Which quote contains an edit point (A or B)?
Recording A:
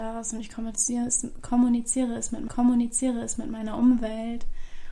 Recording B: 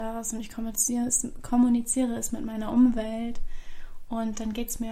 A